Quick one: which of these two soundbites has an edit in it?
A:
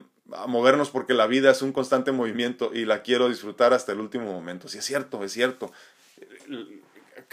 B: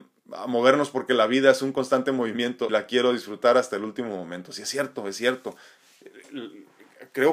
B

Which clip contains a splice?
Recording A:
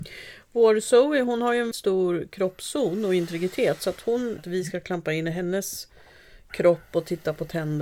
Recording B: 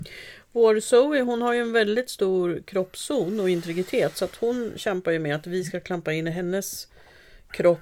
A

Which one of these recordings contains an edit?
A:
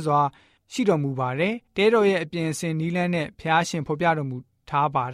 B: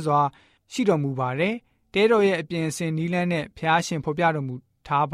A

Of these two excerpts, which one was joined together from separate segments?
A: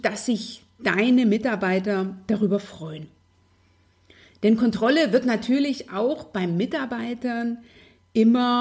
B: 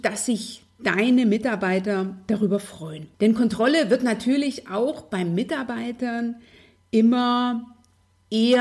B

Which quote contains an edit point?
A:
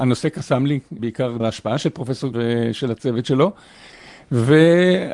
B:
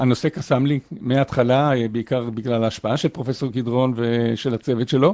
A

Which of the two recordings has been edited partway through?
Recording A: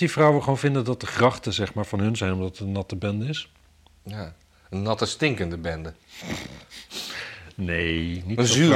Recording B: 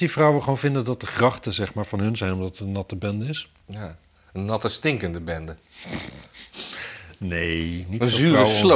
B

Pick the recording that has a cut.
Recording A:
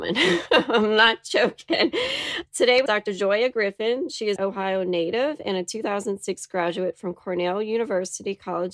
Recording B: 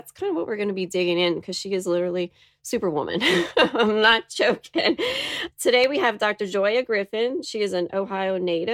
A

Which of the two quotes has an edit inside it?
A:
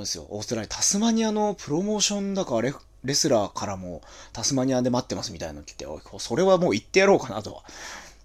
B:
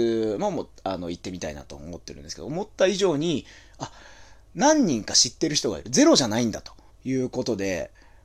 B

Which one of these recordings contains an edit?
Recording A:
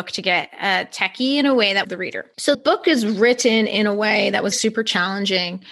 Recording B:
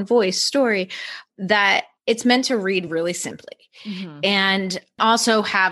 A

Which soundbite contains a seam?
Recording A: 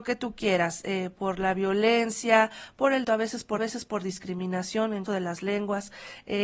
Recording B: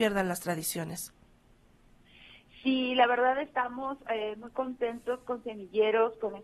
A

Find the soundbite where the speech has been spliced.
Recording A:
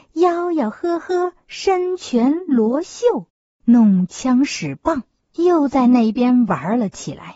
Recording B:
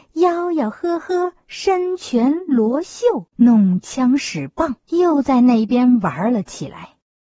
B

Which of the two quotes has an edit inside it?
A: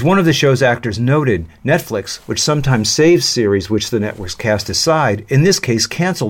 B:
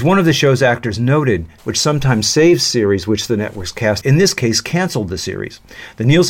B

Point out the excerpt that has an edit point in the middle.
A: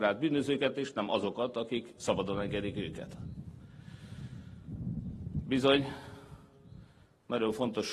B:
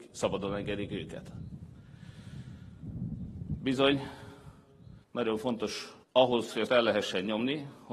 B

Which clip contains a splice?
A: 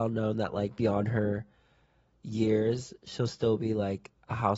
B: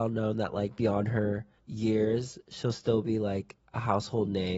B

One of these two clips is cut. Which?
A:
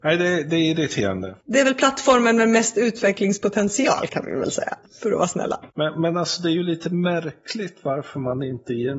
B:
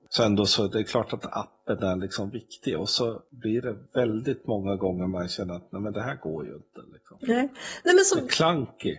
B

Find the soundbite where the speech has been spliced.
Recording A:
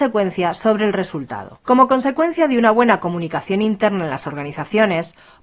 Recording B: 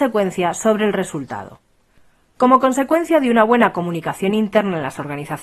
A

